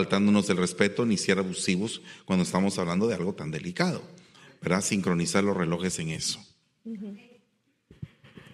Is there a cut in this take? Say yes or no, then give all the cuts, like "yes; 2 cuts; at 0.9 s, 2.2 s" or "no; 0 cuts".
no; 0 cuts